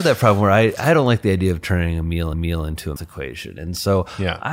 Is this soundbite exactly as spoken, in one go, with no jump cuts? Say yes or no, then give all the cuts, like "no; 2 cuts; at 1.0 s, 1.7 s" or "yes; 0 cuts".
no; 2 cuts; at 2.3 s, 3.0 s